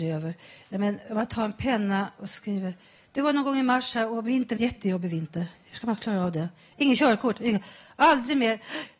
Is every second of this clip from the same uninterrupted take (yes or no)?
no